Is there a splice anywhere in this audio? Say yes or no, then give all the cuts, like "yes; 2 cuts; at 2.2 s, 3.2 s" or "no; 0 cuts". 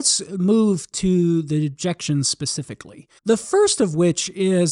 yes; 1 cut; at 3.2 s